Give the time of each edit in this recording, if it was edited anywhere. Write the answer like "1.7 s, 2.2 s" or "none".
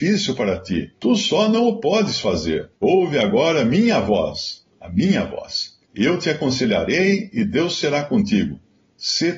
0.9 s, 2.8 s, 4.7 s, 5.8 s